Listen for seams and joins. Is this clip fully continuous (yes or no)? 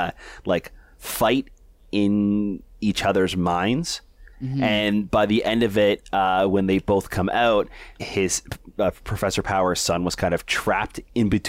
no